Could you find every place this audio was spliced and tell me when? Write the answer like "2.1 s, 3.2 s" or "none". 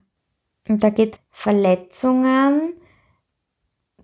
1.2 s